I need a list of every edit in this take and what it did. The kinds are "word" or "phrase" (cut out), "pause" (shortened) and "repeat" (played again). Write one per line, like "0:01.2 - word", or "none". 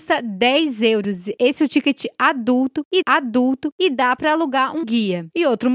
0:03.0 - repeat
0:04.8 - word